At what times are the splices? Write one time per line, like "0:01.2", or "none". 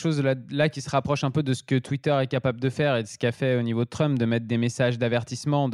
none